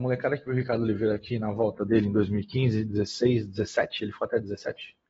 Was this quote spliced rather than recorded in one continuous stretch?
no; 0 cuts

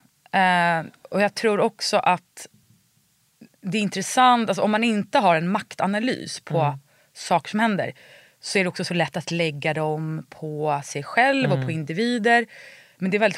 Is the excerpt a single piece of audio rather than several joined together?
yes; 0 cuts

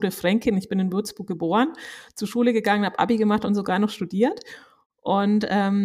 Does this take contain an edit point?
no; 0 cuts

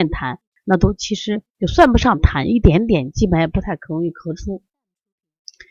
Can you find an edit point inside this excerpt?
yes; 1 cut; at 1.5 s

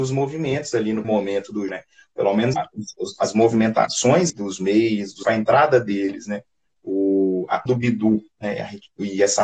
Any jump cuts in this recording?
yes; 6 cuts; at 1.0 s, 1.7 s, 2.5 s, 4.3 s, 5.2 s, 7.7 s

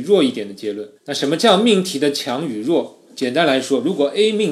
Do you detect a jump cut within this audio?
yes; 1 cut; at 1.0 s

